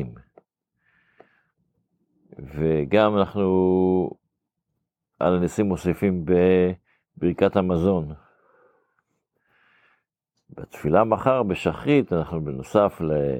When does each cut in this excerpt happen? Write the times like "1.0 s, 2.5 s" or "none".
none